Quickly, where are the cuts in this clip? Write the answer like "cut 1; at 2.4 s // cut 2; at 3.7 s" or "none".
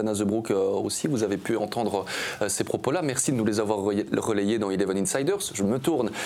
none